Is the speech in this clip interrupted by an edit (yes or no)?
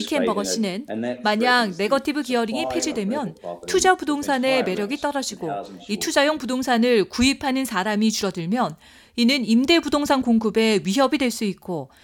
no